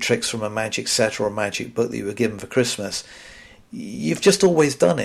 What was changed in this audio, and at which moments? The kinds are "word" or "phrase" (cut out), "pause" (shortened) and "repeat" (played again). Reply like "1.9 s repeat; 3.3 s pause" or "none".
none